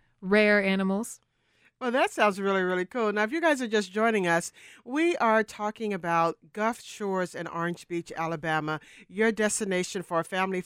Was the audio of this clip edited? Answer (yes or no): no